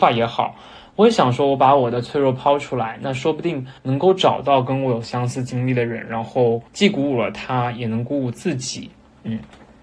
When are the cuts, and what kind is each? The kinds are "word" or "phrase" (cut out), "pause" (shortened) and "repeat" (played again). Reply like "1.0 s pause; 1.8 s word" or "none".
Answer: 3.8 s pause; 6.7 s pause